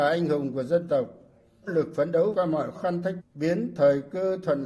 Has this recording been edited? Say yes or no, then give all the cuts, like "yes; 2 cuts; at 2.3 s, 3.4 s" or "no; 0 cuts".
yes; 4 cuts; at 1.7 s, 2.3 s, 2.7 s, 3.2 s